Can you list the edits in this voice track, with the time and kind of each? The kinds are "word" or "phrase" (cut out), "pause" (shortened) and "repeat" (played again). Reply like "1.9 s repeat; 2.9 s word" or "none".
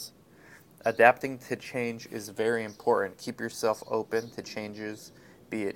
none